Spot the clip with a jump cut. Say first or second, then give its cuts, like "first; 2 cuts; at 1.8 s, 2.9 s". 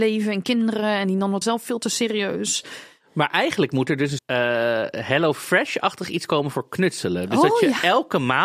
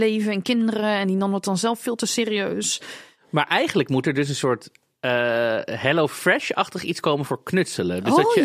first; 2 cuts; at 1.4 s, 4.2 s